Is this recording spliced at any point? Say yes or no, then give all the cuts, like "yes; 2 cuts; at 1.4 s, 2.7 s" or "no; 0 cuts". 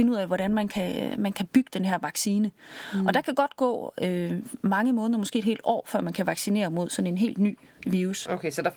no; 0 cuts